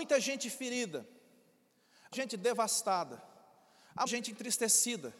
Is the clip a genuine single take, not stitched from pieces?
no; 2 cuts; at 2.1 s, 4.1 s

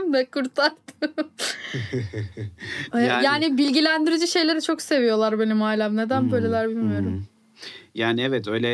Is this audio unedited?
yes; 0 cuts

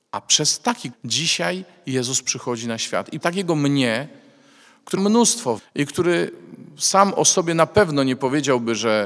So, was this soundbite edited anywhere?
yes; 4 cuts; at 0.9 s, 3.2 s, 5.0 s, 5.6 s

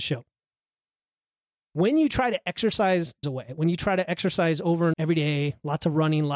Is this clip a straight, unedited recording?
no; 2 cuts; at 3.2 s, 4.9 s

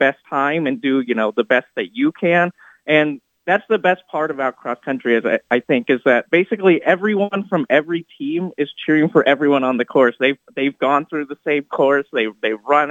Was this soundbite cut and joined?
no; 0 cuts

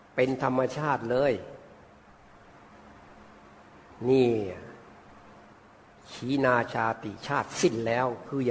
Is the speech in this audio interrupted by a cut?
no; 0 cuts

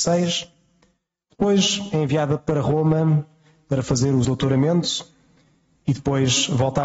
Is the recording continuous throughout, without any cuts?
no; 1 cut; at 4.2 s

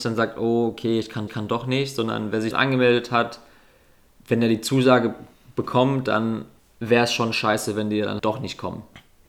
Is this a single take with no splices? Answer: no; 4 cuts; at 1.3 s, 2.5 s, 6.6 s, 8.2 s

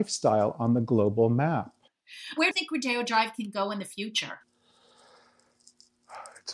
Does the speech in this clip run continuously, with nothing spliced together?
no; 1 cut; at 2.5 s

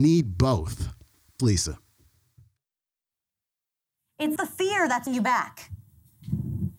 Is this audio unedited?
no; 3 cuts; at 1.4 s, 4.4 s, 5.1 s

